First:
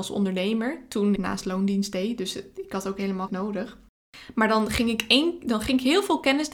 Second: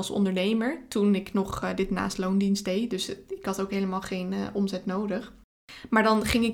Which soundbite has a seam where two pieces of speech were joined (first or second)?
first